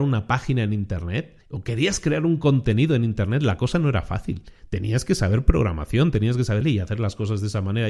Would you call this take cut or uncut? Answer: cut